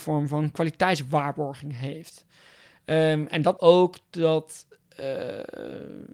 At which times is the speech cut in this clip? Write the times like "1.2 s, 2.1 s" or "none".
3.6 s